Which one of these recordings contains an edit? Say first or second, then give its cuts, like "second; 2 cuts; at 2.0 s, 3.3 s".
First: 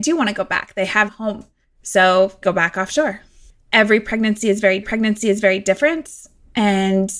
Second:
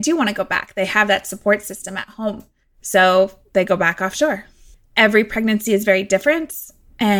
first; 3 cuts; at 1.1 s, 2.4 s, 4.8 s